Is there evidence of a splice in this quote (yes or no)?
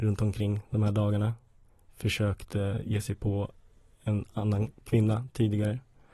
no